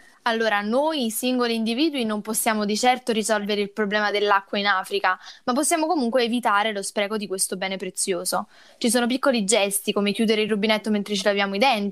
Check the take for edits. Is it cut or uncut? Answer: uncut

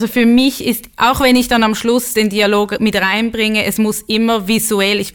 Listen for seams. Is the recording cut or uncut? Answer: uncut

